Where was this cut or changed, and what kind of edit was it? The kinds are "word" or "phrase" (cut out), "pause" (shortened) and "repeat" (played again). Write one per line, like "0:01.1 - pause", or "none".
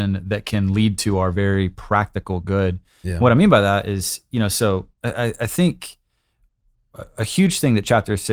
0:04.9 - pause